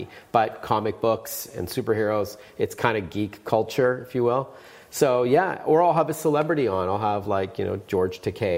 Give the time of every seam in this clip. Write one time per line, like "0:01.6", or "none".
none